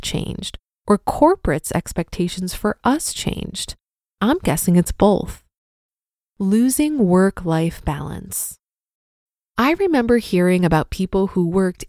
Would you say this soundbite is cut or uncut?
uncut